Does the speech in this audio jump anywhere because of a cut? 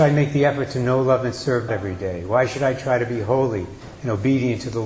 yes; 1 cut; at 1.7 s

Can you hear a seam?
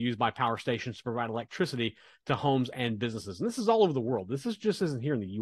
no; 0 cuts

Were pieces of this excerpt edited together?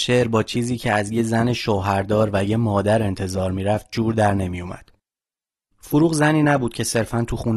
no; 0 cuts

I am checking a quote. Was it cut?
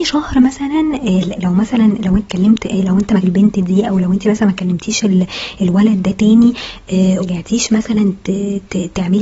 yes; 4 cuts; at 1.4 s, 2.2 s, 3.2 s, 7.2 s

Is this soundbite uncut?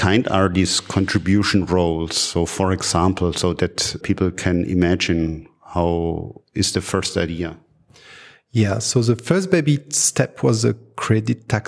no; 1 cut; at 4.0 s

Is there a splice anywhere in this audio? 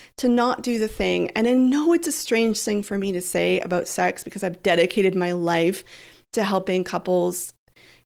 no; 0 cuts

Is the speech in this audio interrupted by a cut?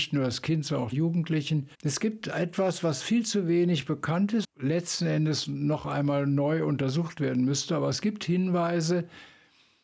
yes; 3 cuts; at 0.9 s, 1.7 s, 4.4 s

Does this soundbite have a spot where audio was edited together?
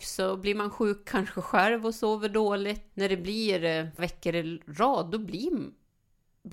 yes; 2 cuts; at 2.9 s, 4.0 s

